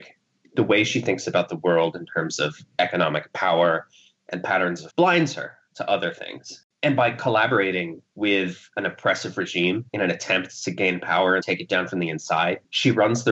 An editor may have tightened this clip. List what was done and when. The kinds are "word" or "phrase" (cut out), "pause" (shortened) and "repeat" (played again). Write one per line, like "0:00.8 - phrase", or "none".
0:04.9 - word
0:09.9 - pause
0:11.4 - word